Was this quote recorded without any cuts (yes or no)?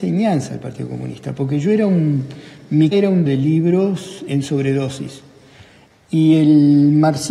no